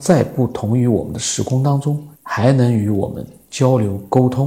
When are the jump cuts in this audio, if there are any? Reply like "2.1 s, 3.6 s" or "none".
2.2 s